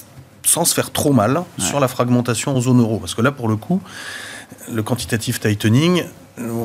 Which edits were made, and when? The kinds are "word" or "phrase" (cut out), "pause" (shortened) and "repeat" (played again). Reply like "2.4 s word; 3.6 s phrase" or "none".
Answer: none